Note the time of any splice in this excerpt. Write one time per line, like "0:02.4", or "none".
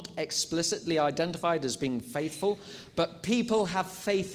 none